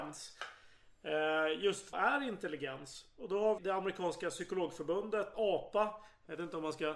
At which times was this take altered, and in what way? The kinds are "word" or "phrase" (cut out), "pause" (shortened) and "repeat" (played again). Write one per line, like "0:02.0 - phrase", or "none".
0:01.9 - word
0:03.6 - word
0:05.3 - word